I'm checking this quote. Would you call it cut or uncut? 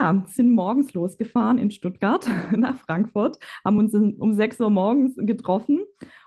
uncut